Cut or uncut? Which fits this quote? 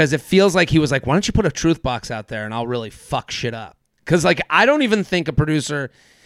uncut